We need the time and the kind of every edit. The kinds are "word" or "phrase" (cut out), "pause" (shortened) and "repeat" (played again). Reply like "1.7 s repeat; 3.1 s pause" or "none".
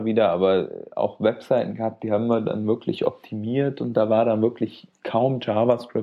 none